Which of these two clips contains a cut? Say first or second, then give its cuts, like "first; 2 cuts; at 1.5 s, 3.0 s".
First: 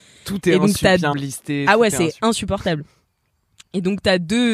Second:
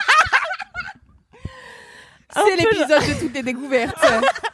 first; 1 cut; at 1.1 s